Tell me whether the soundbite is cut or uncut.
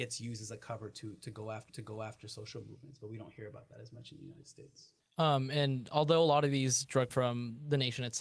cut